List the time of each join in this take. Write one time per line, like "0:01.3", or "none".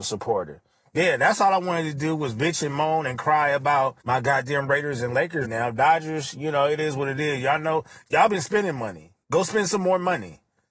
0:04.0
0:05.4